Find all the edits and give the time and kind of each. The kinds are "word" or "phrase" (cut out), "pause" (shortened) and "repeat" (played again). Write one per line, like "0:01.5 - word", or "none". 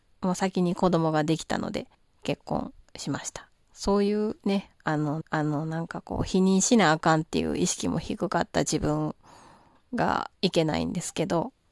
0:01.9 - pause
0:05.2 - repeat